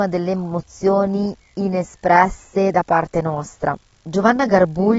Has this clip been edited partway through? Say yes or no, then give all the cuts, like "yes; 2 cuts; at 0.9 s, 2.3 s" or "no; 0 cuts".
no; 0 cuts